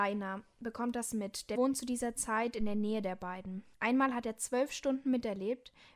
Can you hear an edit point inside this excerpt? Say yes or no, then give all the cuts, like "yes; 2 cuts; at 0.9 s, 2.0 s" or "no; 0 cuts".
yes; 1 cut; at 1.6 s